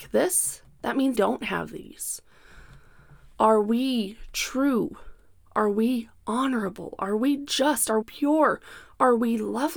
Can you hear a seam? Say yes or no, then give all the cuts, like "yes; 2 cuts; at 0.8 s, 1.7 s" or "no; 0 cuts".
yes; 2 cuts; at 1.1 s, 8.0 s